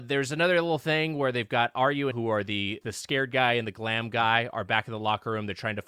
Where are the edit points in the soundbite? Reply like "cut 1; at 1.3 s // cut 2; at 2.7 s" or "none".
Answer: cut 1; at 2.1 s // cut 2; at 2.8 s

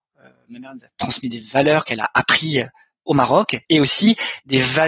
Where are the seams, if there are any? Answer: none

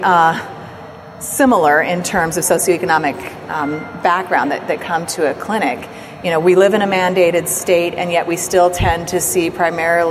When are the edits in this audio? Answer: none

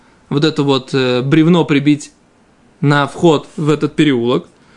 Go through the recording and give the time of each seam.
none

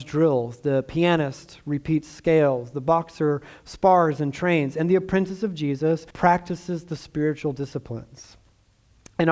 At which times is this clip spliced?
cut 1; at 6.1 s

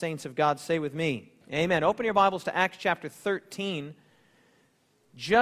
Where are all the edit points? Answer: cut 1; at 1.4 s

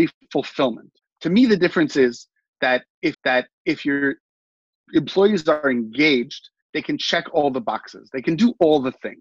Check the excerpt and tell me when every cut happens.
cut 1; at 1.0 s // cut 2; at 3.1 s

